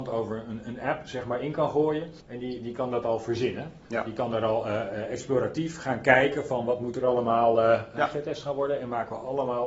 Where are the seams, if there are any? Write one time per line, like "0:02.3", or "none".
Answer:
0:02.2
0:03.8